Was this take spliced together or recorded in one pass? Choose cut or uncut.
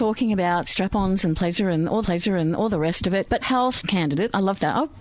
cut